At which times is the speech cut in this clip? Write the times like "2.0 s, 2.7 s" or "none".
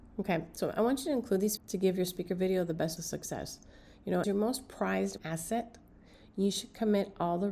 1.6 s, 3.0 s, 4.2 s, 5.2 s